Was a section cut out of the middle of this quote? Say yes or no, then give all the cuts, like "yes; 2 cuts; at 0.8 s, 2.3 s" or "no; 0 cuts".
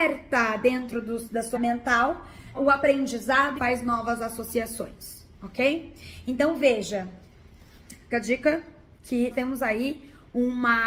yes; 5 cuts; at 1.5 s, 2.5 s, 3.6 s, 8.1 s, 9.3 s